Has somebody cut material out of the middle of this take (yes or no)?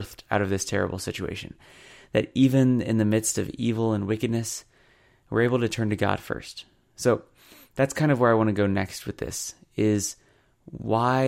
no